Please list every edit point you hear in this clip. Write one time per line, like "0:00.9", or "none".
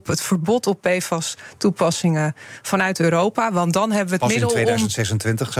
none